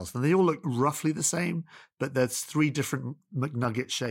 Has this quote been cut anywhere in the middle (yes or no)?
no